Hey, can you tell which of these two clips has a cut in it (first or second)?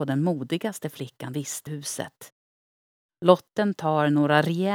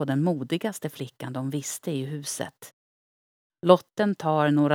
first